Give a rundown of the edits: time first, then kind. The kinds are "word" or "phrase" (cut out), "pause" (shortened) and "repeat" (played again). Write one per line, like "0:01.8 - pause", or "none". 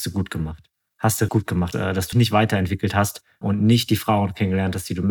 0:01.3 - word
0:01.7 - word
0:02.1 - word
0:03.4 - word